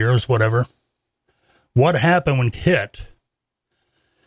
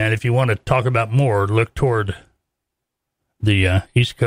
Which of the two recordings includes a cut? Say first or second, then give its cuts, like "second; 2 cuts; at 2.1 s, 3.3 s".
first; 1 cut; at 2.5 s